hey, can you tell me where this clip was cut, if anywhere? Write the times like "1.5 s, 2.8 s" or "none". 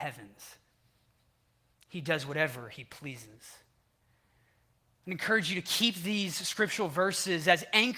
none